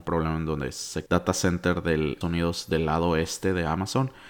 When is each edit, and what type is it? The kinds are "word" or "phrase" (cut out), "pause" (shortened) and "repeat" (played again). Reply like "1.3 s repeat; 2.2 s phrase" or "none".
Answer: 1.1 s phrase; 2.2 s word